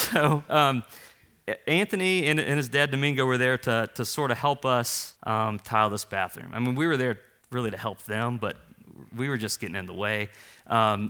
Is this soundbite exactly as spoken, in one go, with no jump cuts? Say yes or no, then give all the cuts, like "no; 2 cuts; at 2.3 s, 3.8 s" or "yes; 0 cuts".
no; 2 cuts; at 5.2 s, 7.4 s